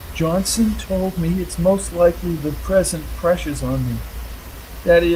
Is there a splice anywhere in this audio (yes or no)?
no